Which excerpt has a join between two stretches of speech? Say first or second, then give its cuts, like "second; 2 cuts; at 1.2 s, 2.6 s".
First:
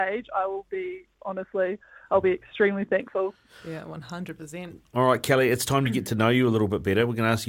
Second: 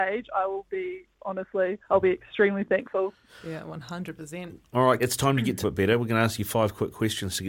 second; 3 cuts; at 1.8 s, 5.0 s, 5.6 s